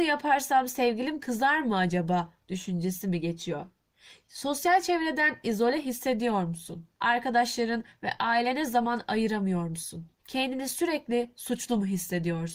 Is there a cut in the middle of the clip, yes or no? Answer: yes